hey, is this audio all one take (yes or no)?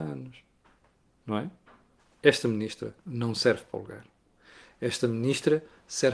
no